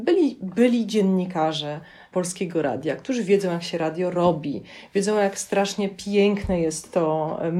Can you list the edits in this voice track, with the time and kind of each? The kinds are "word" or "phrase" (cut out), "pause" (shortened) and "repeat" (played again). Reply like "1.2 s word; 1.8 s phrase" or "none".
none